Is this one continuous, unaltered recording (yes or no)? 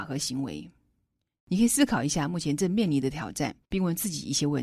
no